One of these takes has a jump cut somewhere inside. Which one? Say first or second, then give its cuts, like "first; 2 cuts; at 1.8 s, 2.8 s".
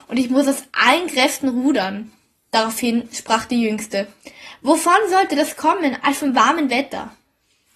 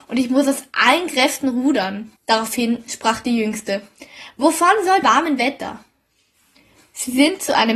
second; 2 cuts; at 2.2 s, 5.0 s